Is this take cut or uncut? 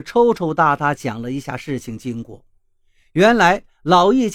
uncut